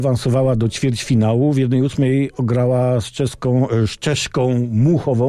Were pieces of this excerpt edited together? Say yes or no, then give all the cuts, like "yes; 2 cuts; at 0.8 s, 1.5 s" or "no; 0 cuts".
no; 0 cuts